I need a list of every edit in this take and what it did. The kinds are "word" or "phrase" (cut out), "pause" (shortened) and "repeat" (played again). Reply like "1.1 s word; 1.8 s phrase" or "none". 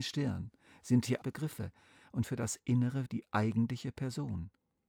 1.2 s word; 2.2 s word; 3.1 s word

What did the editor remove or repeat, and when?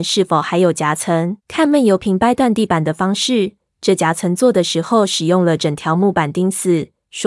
1.4 s pause

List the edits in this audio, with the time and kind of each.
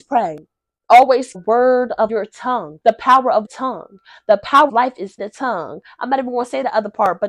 1.3 s phrase; 2.1 s phrase; 2.8 s pause; 3.4 s phrase; 4.7 s word; 5.2 s word

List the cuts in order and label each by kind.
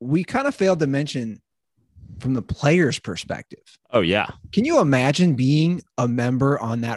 3.8 s pause

